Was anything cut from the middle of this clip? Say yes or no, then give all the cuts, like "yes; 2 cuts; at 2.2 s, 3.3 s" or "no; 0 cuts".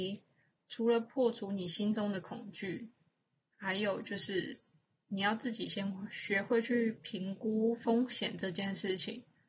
no; 0 cuts